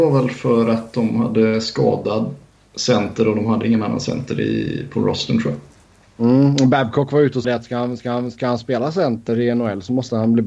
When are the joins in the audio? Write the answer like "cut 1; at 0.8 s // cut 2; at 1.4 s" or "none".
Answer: cut 1; at 7.4 s // cut 2; at 8.0 s